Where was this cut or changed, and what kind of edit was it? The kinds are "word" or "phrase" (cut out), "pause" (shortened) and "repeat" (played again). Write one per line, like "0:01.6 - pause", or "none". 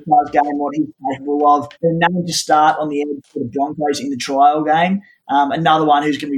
0:01.7 - pause